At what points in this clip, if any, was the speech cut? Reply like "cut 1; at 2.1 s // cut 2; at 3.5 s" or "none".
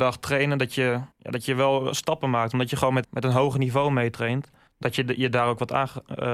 cut 1; at 1.1 s // cut 2; at 3.0 s // cut 3; at 4.7 s